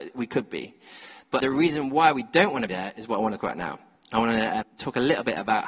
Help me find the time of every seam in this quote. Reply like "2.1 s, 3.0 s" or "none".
1.4 s, 2.7 s, 3.4 s, 4.6 s

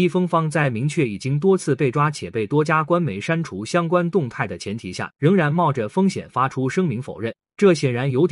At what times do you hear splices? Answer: 5.1 s

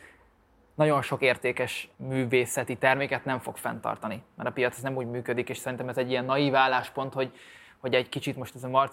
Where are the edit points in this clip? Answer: 1.9 s

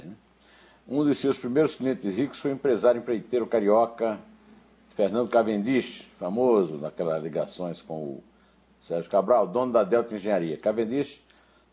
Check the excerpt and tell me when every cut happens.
none

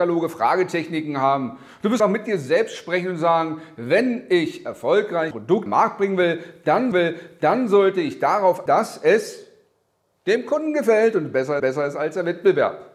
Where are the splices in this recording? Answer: 2.0 s, 5.3 s, 5.7 s, 6.9 s, 8.7 s, 11.6 s

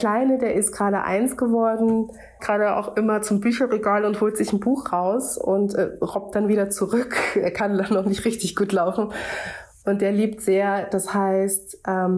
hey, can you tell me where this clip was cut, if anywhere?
2.4 s

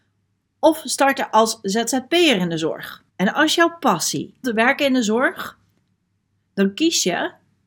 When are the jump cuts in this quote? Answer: 3.1 s, 4.4 s

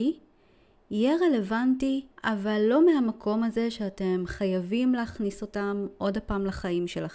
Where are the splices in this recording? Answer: 2.1 s

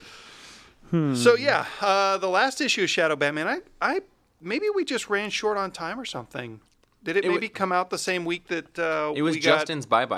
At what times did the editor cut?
none

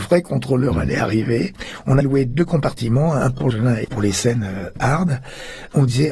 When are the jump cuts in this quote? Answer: 2.0 s, 3.5 s, 3.8 s

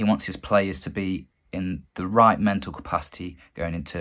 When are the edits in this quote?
none

